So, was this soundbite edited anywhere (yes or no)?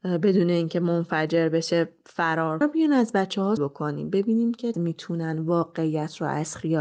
yes